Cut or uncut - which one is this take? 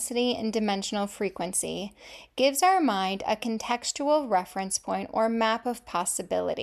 uncut